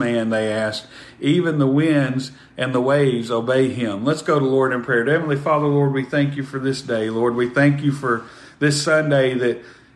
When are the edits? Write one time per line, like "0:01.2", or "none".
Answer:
none